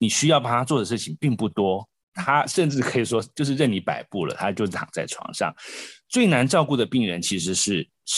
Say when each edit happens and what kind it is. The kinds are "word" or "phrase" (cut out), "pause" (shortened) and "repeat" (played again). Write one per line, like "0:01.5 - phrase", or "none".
0:02.0 - pause